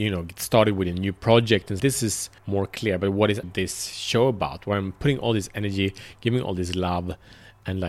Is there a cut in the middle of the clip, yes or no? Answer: yes